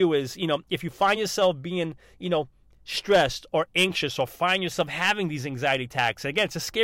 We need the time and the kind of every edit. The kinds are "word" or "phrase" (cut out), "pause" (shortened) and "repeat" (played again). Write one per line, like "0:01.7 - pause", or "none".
none